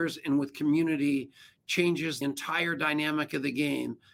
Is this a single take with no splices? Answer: no; 1 cut; at 2.2 s

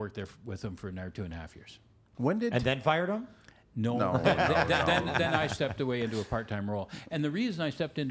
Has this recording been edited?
no; 0 cuts

